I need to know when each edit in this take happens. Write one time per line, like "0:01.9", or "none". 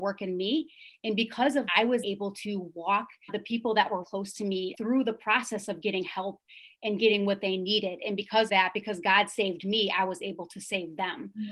0:01.7
0:02.0
0:03.3
0:04.0
0:04.7
0:08.5